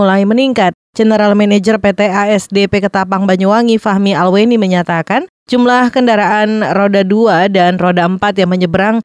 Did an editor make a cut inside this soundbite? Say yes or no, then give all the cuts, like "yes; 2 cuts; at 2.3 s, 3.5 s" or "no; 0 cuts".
no; 0 cuts